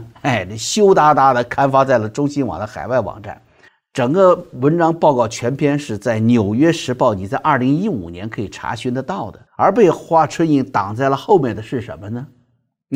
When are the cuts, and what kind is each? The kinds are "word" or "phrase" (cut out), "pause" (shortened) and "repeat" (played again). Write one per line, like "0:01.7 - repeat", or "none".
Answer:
0:03.7 - pause
0:09.5 - pause